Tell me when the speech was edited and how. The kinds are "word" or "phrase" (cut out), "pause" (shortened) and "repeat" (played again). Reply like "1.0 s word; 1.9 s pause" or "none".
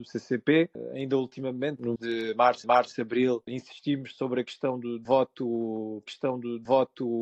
2.0 s word; 2.6 s repeat; 6.1 s repeat